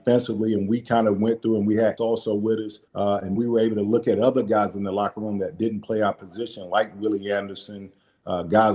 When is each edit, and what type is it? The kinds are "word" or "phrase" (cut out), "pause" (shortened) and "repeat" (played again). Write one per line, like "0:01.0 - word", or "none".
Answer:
0:02.0 - phrase
0:02.9 - pause
0:03.4 - word

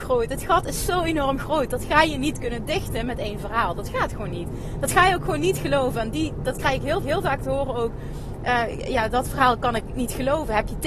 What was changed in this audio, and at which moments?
0:07.0 - repeat

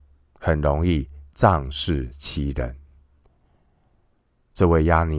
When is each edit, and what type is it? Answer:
none

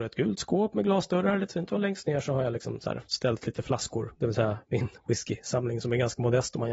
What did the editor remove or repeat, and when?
none

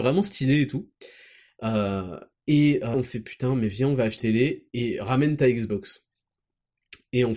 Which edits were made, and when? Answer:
0:02.9 - word
0:04.2 - word

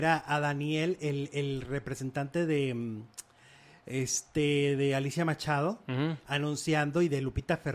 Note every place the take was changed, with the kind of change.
none

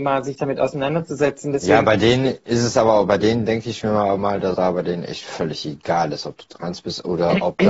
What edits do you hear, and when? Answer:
0:04.5 - word

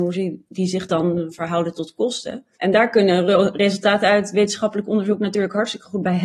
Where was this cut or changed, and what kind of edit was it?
0:02.5 - pause

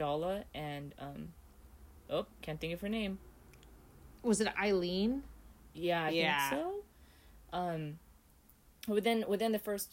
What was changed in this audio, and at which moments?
none

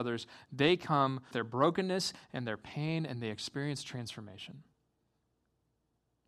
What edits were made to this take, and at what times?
0:01.3 - word

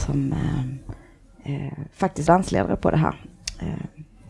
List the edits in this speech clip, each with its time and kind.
0:02.3 - word

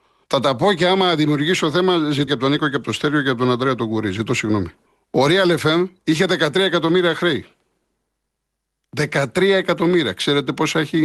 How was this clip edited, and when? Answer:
0:02.3 - word
0:04.9 - pause

